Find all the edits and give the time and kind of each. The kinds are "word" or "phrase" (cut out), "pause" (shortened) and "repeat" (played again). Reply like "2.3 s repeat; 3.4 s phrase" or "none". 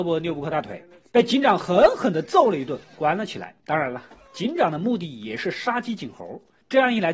3.6 s pause